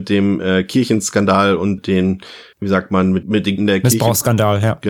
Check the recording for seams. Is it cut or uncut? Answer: cut